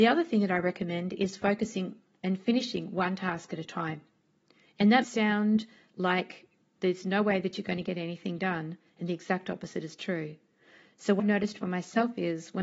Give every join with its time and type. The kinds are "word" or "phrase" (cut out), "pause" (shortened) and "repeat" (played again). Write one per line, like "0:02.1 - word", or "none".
0:05.0 - word
0:11.2 - word